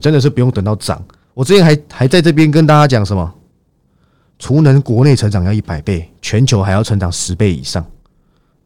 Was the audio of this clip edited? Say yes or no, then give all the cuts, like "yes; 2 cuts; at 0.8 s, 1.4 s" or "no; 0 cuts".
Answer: yes; 1 cut; at 1.2 s